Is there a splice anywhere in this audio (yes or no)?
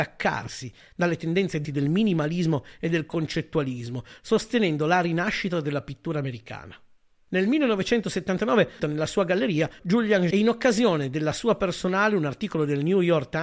yes